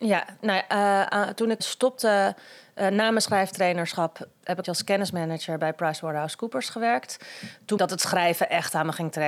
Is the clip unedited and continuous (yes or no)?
no